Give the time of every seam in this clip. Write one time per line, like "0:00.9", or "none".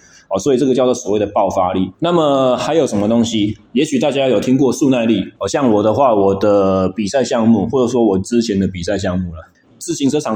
0:01.9
0:03.7
0:05.4